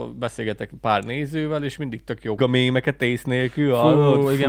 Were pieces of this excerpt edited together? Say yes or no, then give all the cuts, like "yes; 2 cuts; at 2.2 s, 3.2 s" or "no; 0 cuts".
yes; 1 cut; at 2.4 s